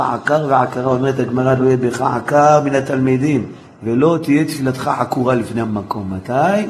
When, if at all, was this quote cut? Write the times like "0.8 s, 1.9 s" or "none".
3.7 s